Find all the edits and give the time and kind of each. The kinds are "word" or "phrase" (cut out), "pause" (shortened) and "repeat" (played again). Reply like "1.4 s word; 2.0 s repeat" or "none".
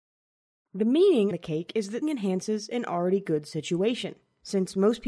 1.3 s phrase; 2.0 s word